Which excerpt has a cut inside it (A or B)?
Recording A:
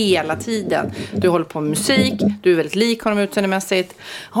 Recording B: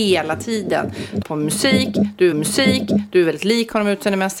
B